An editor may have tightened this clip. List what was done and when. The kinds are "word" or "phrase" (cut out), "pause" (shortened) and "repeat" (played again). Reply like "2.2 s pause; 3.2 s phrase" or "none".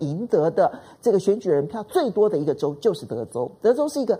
none